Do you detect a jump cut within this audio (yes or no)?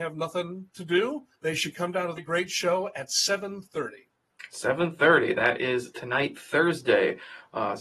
yes